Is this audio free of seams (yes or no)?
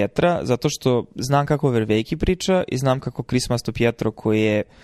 yes